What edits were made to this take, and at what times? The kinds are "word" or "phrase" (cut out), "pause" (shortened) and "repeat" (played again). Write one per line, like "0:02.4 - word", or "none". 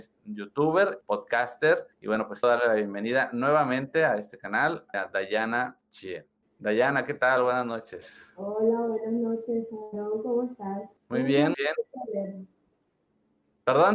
0:01.0 - phrase
0:01.9 - pause
0:02.4 - word
0:04.9 - word
0:06.4 - pause
0:11.0 - pause
0:11.5 - word

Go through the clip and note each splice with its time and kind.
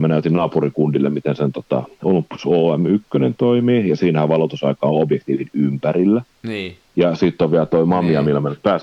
0:06.9 - pause

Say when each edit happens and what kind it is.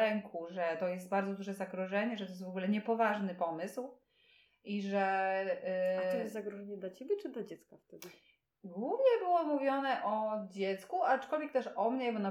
none

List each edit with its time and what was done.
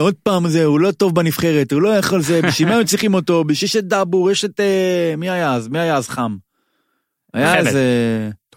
none

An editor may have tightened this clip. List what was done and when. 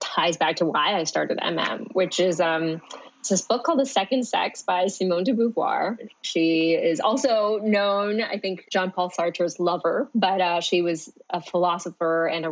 0:08.6 - word

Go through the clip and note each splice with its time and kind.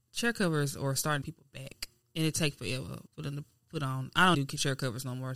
0:01.2 - phrase
0:02.0 - pause
0:03.1 - pause
0:04.3 - word

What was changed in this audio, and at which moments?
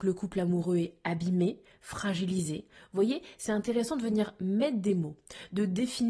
none

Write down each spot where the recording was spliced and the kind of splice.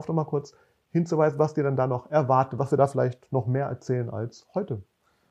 none

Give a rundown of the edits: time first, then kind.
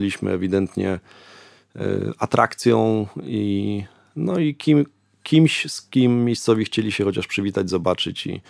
none

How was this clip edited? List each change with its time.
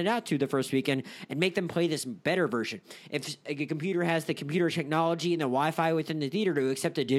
none

